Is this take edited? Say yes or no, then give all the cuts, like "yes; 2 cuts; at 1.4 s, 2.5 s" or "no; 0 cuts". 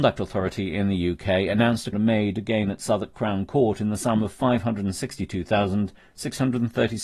yes; 1 cut; at 1.9 s